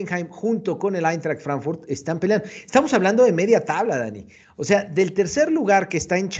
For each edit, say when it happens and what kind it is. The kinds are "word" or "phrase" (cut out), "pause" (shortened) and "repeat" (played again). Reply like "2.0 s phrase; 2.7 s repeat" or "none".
none

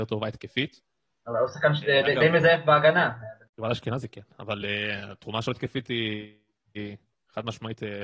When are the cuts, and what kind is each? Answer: none

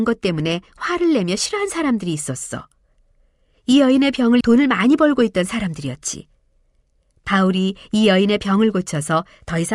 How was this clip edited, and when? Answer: 4.4 s word

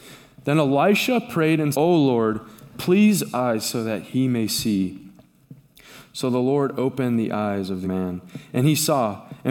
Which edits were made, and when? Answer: 1.7 s word; 3.3 s phrase; 7.8 s word

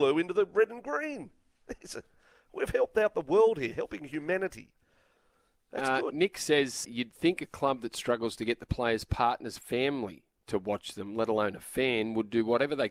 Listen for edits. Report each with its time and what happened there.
6.8 s word

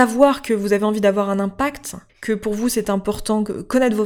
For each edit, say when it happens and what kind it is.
2.1 s pause

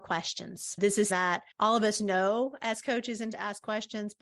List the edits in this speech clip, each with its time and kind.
1.1 s word; 1.5 s pause; 3.3 s word

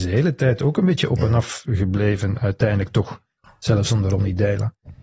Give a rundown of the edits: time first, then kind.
none

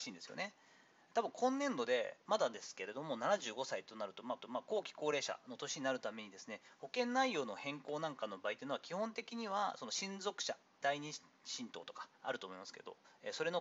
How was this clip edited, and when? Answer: 4.4 s repeat; 10.8 s word; 12.1 s pause

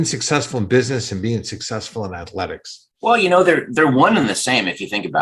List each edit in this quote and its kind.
2.9 s pause

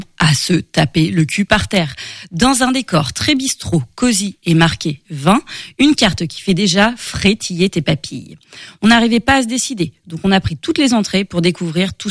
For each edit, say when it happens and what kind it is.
none

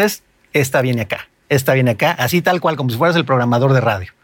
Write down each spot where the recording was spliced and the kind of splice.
none

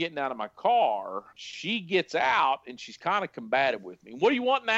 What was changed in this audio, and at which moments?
1.3 s pause

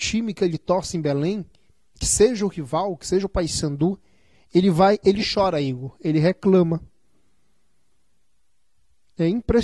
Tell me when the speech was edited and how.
none

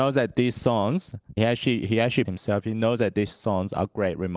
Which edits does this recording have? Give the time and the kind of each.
1.4 s word; 2.3 s phrase

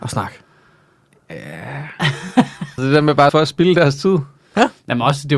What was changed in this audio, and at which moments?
2.8 s word; 3.3 s phrase

